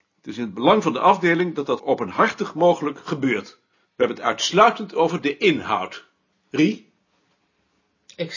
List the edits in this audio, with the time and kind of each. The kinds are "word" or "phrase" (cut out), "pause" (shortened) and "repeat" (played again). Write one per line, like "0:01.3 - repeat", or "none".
0:01.8 - word
0:03.7 - pause
0:06.3 - pause